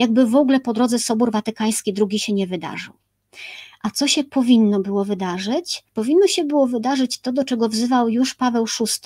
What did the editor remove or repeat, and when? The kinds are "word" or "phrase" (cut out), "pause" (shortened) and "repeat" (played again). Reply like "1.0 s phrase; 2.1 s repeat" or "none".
5.9 s pause